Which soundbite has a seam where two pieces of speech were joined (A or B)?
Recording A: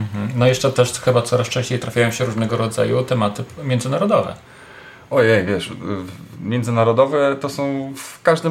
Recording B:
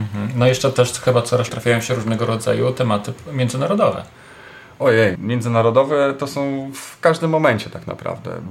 B